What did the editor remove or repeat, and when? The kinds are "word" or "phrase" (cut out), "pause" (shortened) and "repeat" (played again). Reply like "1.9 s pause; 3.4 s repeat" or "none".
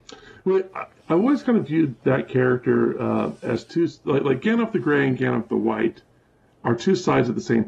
none